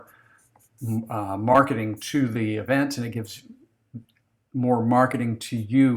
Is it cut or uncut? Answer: uncut